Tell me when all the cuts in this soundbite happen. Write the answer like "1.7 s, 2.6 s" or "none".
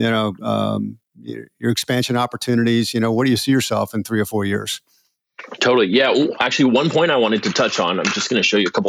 none

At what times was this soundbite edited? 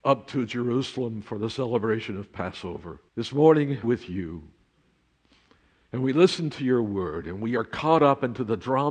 3.1 s, 3.8 s

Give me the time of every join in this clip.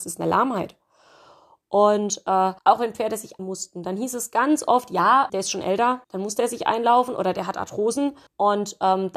2.6 s, 3.4 s, 5.3 s, 6.0 s, 8.3 s

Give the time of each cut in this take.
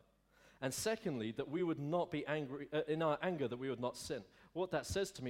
none

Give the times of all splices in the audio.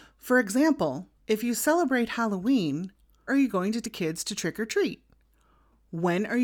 1.2 s, 3.3 s, 3.8 s

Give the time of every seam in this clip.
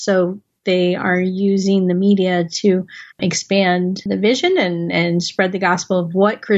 3.1 s

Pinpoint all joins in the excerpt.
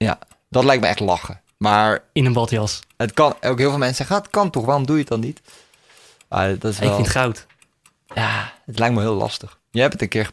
none

